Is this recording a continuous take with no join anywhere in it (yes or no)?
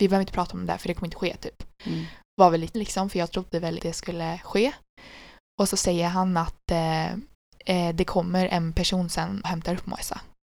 no